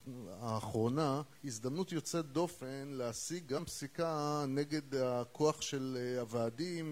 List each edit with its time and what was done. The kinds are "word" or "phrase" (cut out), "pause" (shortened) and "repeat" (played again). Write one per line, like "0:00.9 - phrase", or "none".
0:01.3 - pause